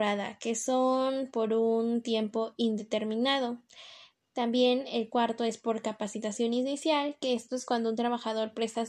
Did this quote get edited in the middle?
no; 0 cuts

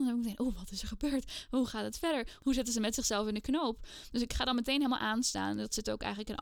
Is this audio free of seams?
yes; 0 cuts

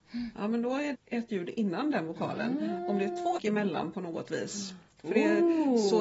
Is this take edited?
yes; 3 cuts; at 0.9 s, 1.3 s, 3.4 s

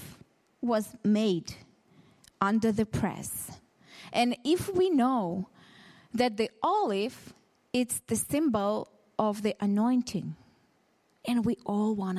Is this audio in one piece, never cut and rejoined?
yes; 0 cuts

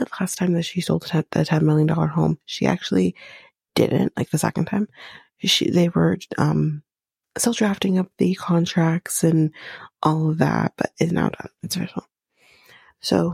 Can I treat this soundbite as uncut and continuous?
yes; 0 cuts

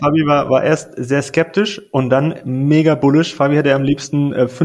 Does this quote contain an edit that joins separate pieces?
no; 0 cuts

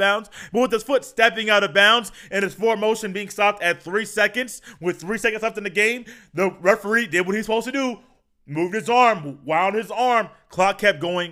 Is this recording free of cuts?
yes; 0 cuts

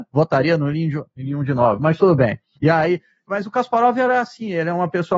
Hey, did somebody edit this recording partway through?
no; 0 cuts

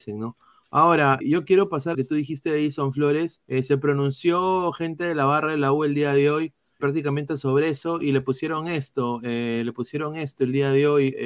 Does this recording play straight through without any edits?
no; 4 cuts; at 1.2 s, 1.9 s, 3.4 s, 6.8 s

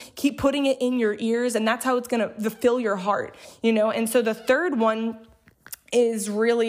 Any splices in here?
no; 0 cuts

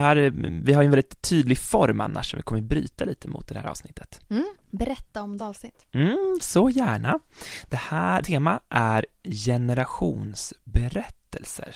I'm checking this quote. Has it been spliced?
yes; 3 cuts; at 5.4 s, 8.2 s, 9.2 s

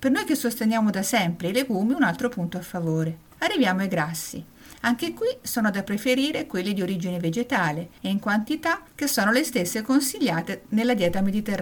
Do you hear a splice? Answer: no; 0 cuts

